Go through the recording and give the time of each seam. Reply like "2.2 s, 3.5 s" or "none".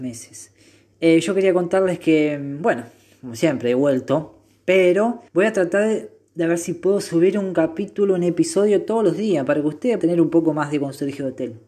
5.3 s, 6.3 s, 10.0 s